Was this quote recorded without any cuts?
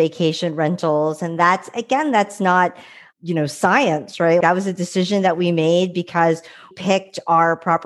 no; 3 cuts; at 3.1 s, 4.4 s, 6.7 s

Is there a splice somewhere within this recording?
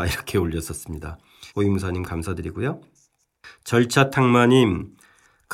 yes; 1 cut; at 1.5 s

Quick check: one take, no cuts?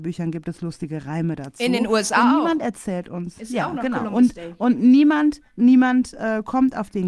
yes; 0 cuts

